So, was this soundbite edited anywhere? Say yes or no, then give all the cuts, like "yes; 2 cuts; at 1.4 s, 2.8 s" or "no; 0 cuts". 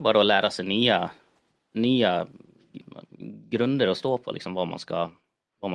no; 0 cuts